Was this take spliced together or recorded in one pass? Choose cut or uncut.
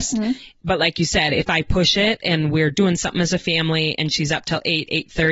uncut